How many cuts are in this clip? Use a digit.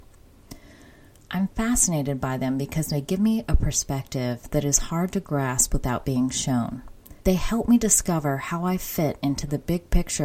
1